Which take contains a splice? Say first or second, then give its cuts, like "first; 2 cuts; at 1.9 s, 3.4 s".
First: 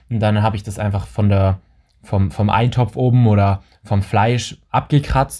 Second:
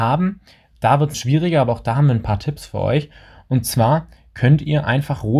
second; 1 cut; at 1.1 s